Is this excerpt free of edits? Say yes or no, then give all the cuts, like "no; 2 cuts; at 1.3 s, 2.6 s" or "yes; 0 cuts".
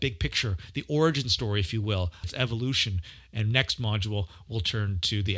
no; 1 cut; at 2.2 s